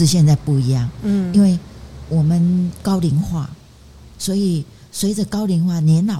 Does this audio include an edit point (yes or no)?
no